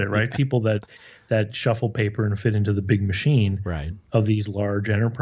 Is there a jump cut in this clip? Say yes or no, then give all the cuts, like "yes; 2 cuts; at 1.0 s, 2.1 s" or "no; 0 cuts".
no; 0 cuts